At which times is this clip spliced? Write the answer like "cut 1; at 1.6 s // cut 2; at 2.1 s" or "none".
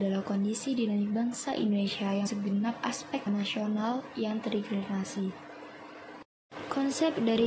cut 1; at 2.3 s // cut 2; at 3.3 s